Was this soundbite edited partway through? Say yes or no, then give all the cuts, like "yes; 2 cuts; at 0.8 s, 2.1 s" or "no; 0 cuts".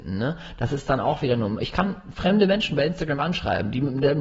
yes; 1 cut; at 3.2 s